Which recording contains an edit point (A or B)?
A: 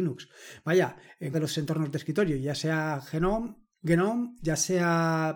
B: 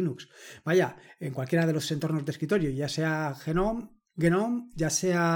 A